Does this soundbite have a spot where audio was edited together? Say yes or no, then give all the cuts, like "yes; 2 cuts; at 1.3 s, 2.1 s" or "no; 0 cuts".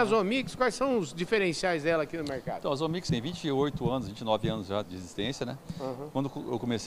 yes; 2 cuts; at 3.1 s, 4.8 s